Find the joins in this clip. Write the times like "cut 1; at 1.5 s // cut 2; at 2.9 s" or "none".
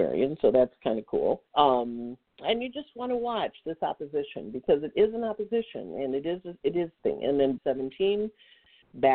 cut 1; at 1.5 s // cut 2; at 7.6 s